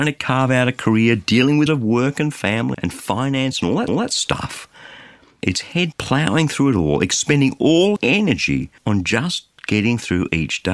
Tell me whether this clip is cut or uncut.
cut